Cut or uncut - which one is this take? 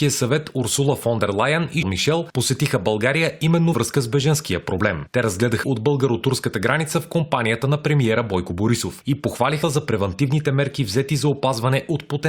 cut